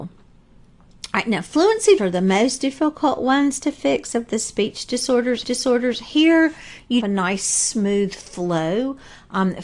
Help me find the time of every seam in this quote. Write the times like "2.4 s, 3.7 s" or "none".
2.0 s, 5.4 s, 7.0 s